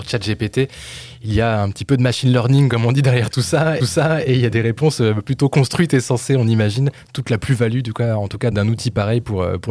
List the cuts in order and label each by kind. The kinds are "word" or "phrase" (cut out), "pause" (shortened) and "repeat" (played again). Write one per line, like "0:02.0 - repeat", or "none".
0:03.8 - repeat
0:08.5 - word